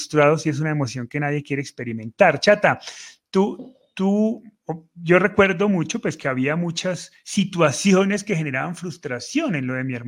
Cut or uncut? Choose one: uncut